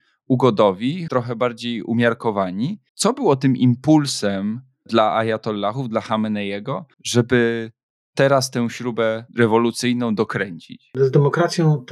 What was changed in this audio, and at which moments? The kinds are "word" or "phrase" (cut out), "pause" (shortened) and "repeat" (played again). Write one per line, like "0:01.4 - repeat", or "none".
0:01.1 - word
0:02.9 - pause
0:06.9 - pause
0:09.3 - pause